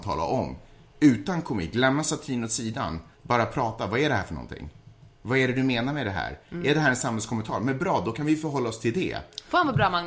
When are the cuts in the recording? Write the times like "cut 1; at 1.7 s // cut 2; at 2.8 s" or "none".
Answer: cut 1; at 3.1 s